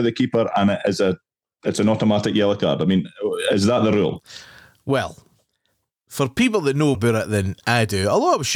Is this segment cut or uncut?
cut